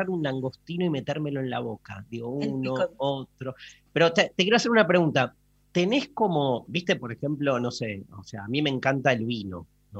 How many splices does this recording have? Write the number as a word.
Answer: zero